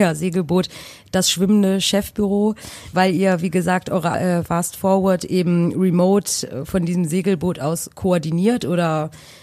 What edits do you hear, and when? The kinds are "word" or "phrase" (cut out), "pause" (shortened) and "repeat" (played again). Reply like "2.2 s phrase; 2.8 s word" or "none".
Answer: 2.9 s word; 4.1 s word